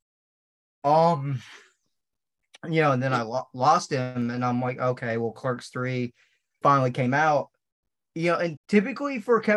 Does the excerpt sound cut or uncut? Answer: cut